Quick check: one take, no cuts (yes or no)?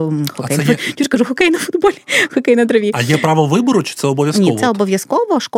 yes